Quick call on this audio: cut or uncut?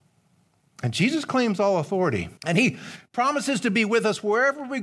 cut